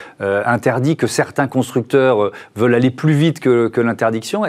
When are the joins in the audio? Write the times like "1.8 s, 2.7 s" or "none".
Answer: none